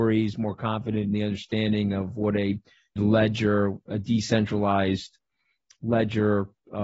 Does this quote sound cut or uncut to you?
cut